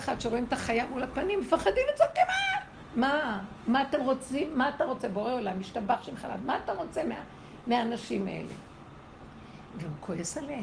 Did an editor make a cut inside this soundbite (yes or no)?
no